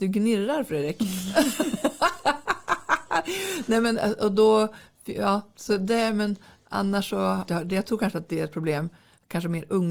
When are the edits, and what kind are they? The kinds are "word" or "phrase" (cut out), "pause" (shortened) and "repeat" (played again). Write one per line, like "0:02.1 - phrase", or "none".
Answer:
0:07.5 - phrase